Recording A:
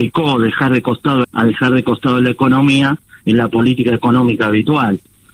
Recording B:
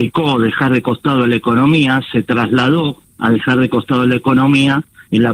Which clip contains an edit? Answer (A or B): A